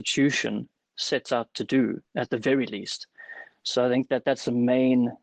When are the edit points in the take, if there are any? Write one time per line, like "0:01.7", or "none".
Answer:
0:02.0